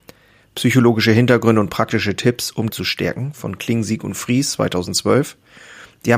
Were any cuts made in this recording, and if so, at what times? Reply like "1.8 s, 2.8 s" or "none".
2.7 s

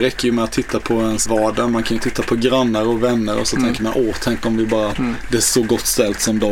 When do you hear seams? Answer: 1.3 s, 4.9 s

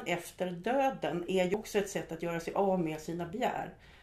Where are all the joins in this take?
none

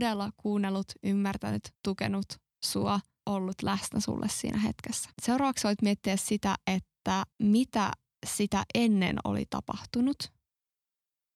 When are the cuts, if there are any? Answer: 1.8 s, 3.2 s, 5.1 s, 7.3 s

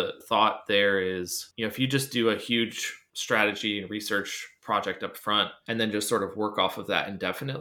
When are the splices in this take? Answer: none

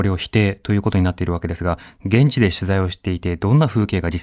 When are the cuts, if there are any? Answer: none

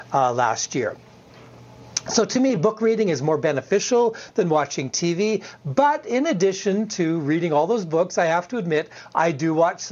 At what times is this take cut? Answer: none

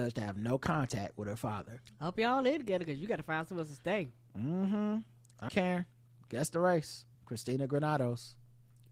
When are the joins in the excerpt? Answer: 5.5 s, 7.1 s

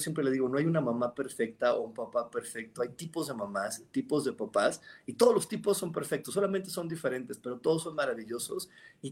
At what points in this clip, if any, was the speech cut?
none

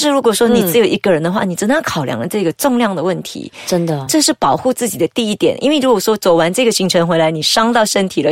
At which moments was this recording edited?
none

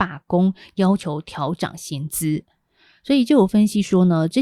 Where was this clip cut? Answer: none

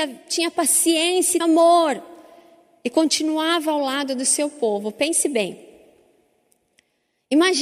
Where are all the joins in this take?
1.4 s

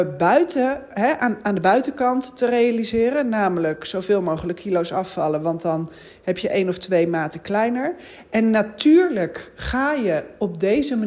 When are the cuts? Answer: none

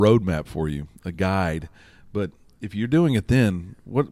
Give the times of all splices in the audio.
none

